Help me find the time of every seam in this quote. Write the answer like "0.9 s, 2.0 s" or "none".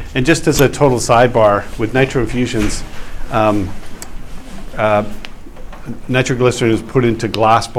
4.7 s